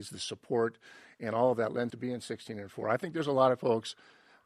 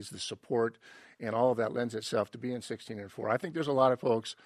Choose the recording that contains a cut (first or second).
first